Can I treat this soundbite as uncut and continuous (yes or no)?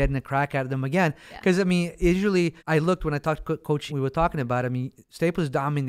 no